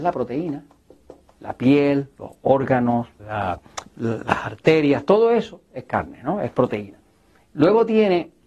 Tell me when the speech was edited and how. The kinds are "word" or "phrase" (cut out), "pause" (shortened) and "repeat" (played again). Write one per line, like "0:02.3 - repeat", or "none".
0:03.2 - word